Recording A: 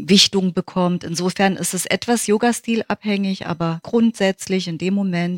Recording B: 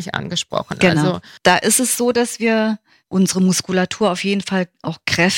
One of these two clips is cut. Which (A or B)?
A